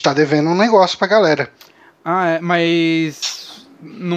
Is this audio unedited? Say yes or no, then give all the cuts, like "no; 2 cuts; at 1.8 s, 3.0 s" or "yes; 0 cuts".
yes; 0 cuts